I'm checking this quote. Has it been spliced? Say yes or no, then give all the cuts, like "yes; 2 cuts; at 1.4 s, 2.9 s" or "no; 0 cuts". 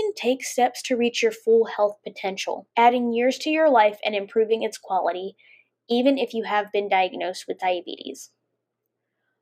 yes; 1 cut; at 2.7 s